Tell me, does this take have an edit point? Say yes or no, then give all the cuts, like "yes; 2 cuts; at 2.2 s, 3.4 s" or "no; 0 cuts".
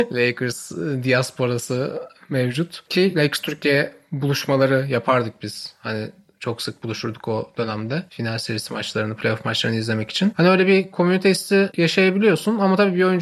no; 0 cuts